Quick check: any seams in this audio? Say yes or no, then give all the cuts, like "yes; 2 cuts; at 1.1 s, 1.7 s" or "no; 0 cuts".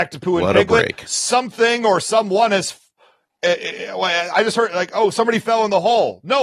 no; 0 cuts